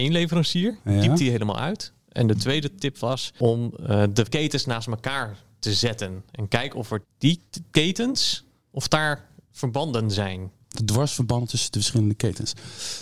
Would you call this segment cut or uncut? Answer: cut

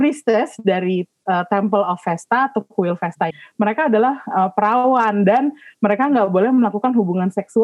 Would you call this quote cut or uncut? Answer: cut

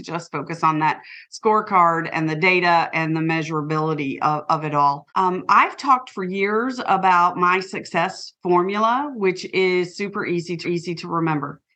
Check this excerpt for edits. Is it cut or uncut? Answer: cut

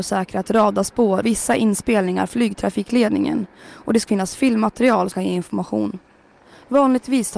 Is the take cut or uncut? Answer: cut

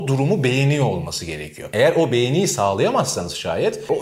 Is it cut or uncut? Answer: uncut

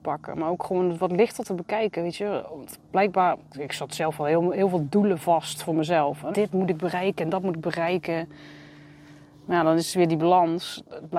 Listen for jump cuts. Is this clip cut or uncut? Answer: cut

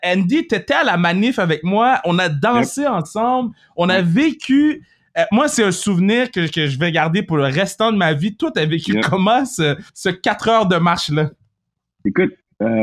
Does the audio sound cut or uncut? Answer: cut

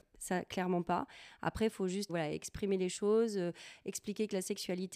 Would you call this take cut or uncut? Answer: cut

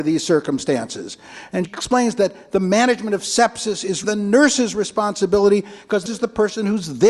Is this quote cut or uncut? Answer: cut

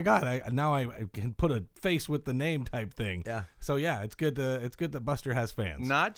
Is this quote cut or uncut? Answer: uncut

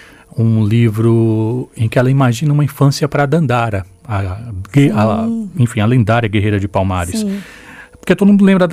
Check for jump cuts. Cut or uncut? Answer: uncut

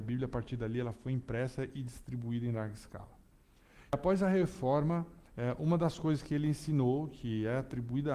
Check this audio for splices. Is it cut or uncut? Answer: cut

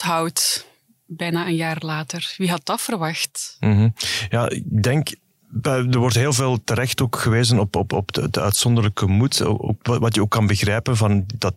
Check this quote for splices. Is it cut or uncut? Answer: uncut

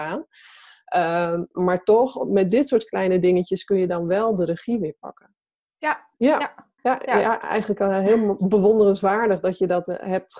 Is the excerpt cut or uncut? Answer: cut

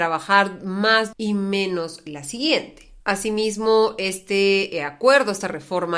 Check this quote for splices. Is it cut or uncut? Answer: cut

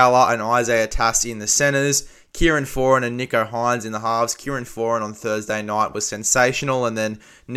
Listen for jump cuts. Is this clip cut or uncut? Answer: uncut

